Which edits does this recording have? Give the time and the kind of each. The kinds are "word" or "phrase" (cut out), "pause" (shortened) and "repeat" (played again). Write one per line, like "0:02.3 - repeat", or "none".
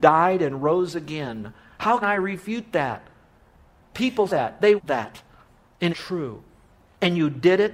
0:02.0 - word
0:04.3 - word
0:04.8 - word
0:05.9 - word